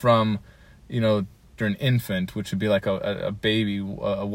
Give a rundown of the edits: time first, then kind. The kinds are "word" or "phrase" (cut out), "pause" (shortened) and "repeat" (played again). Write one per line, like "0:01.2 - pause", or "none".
0:01.6 - word

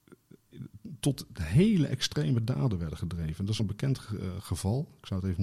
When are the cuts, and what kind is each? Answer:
0:03.6 - word

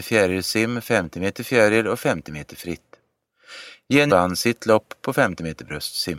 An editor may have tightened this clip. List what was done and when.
0:04.1 - word

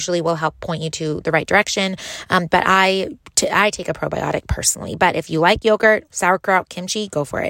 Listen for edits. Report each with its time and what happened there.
none

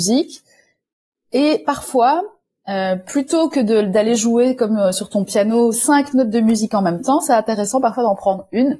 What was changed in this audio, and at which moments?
none

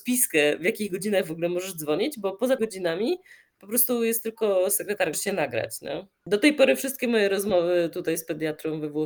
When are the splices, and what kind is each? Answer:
0:02.6 - word
0:05.1 - word

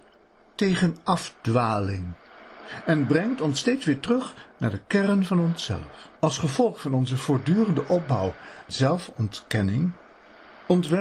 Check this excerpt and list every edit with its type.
0:06.2 - pause
0:08.7 - word

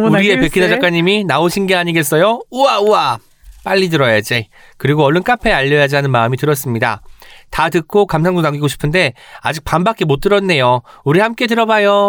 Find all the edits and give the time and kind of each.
none

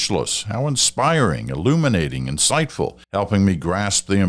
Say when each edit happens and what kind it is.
0:03.0 - pause

